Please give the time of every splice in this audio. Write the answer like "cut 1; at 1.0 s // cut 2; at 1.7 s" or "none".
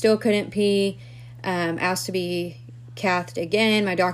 none